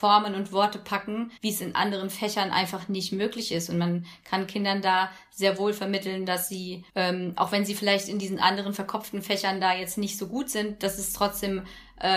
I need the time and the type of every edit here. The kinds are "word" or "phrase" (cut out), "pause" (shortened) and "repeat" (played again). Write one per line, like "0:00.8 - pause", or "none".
0:01.4 - pause
0:06.9 - pause